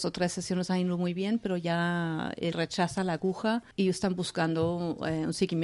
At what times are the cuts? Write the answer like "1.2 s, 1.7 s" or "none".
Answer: 2.5 s, 3.7 s